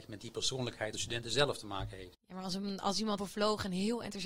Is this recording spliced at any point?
yes; 2 cuts; at 0.9 s, 3.2 s

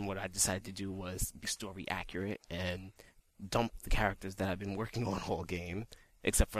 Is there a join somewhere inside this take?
yes; 1 cut; at 1.4 s

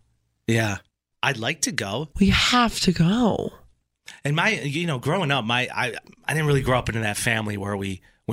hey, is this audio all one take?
no; 1 cut; at 2.1 s

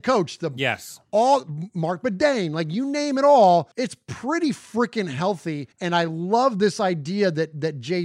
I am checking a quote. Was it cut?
yes; 2 cuts; at 3.7 s, 5.7 s

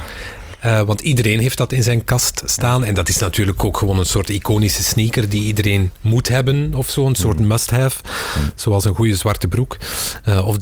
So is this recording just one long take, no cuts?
yes; 0 cuts

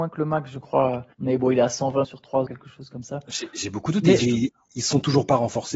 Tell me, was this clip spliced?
yes; 4 cuts; at 1.1 s, 2.0 s, 2.5 s, 4.2 s

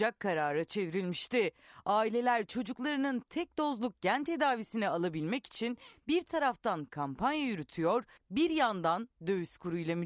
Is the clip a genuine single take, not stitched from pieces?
yes; 0 cuts

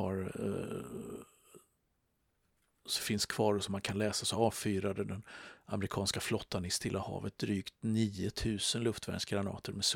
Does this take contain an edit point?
no; 0 cuts

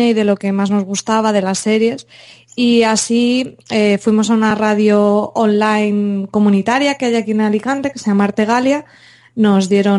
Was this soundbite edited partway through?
no; 0 cuts

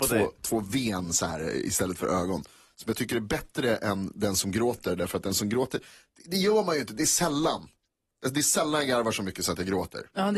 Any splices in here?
no; 0 cuts

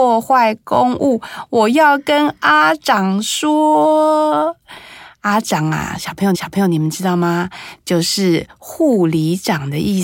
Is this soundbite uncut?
no; 1 cut; at 6.3 s

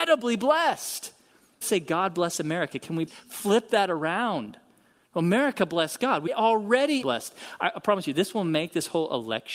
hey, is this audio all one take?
no; 4 cuts; at 1.6 s, 3.1 s, 6.3 s, 7.0 s

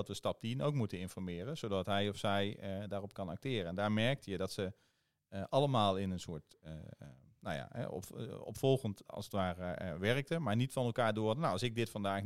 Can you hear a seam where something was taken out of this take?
no; 0 cuts

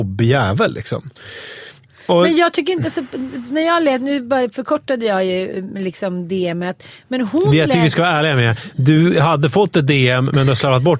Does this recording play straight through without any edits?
yes; 0 cuts

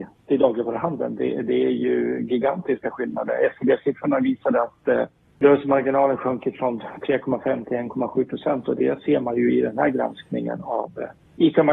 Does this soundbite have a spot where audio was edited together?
no; 0 cuts

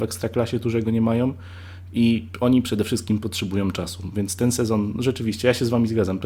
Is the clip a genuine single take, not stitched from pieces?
yes; 0 cuts

